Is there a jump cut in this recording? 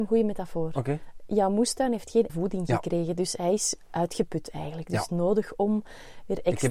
yes; 2 cuts; at 2.3 s, 5.1 s

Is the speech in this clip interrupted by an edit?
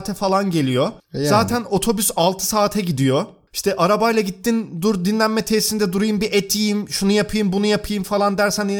no; 0 cuts

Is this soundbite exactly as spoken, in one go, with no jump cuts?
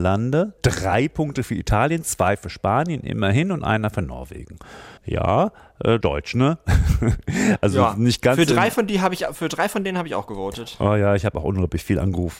no; 3 cuts; at 5.0 s, 6.0 s, 9.3 s

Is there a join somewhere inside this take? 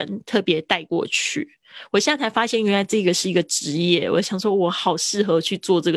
no; 0 cuts

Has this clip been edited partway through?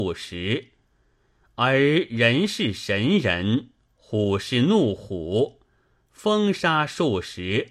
no; 0 cuts

